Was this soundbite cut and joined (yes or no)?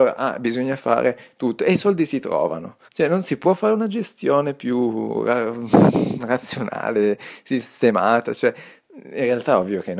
yes